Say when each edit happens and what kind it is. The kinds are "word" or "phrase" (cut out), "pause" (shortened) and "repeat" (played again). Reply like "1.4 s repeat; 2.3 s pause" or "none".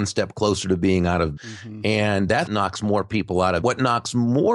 1.4 s word; 2.5 s word; 3.6 s phrase

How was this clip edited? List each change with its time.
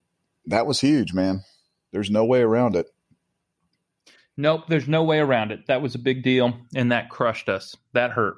none

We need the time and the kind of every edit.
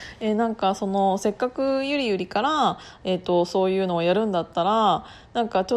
none

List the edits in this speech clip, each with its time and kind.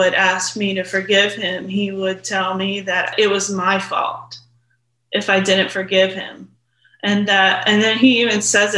none

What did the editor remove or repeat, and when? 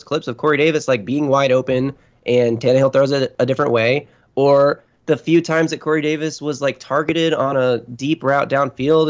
none

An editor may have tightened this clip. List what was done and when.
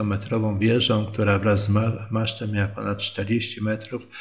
none

